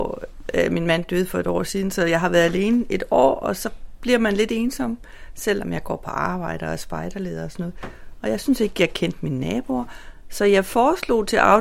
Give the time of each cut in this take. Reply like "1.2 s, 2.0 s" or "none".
none